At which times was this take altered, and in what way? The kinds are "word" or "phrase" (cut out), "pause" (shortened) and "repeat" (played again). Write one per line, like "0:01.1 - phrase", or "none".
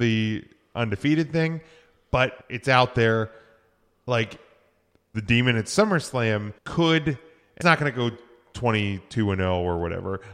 0:02.4 - pause
0:05.1 - phrase
0:06.6 - pause
0:07.6 - word

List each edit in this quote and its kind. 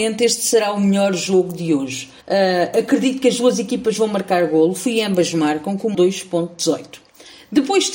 0:02.2 - pause
0:05.9 - word

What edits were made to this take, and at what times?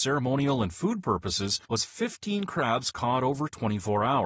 0:01.6 - pause

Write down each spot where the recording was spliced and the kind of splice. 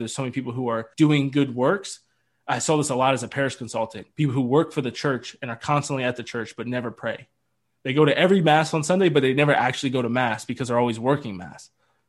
0:00.9 - pause
0:04.1 - pause

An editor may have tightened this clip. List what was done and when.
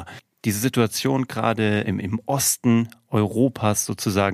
0:01.8 - word

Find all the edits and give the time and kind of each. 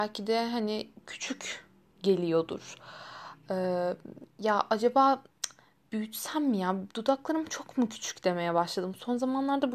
none

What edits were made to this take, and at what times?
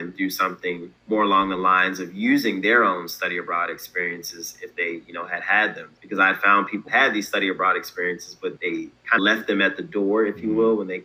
0:01.0 - pause
0:06.0 - pause
0:06.9 - word
0:08.6 - word
0:09.2 - word

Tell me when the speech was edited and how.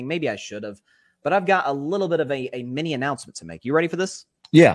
none

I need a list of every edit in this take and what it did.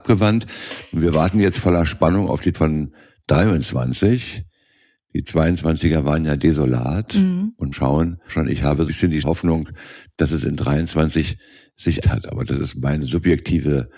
0:02.5 - word
0:07.7 - word
0:08.3 - word
0:08.9 - word
0:09.2 - word
0:12.0 - word

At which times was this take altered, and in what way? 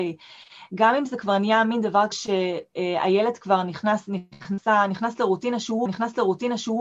0:02.1 - word
0:05.9 - repeat

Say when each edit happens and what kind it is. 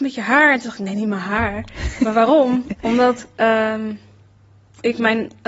none

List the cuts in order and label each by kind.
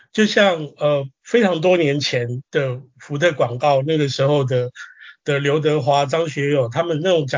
0:02.5 - pause

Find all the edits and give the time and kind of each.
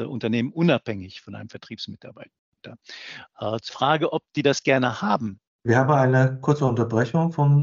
0:03.7 - word
0:05.5 - pause

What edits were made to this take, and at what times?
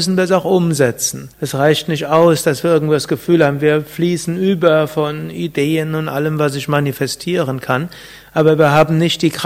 0:01.3 - pause

